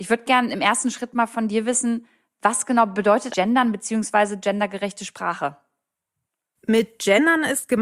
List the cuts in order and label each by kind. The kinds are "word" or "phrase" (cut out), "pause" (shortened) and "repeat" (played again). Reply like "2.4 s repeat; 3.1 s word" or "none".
3.3 s word